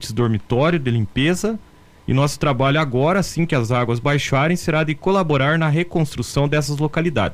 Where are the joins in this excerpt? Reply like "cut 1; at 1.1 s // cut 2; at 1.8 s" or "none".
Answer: none